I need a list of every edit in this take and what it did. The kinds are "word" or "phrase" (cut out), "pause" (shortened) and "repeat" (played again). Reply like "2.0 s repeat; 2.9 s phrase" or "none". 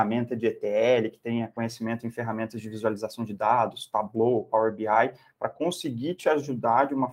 none